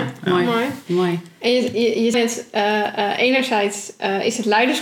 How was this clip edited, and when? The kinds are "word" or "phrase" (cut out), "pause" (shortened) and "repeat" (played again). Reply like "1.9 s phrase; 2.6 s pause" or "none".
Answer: 2.1 s word